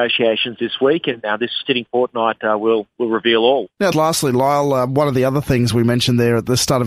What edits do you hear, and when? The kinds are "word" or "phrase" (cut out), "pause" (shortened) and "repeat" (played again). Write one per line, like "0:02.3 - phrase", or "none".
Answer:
0:01.6 - word
0:03.9 - word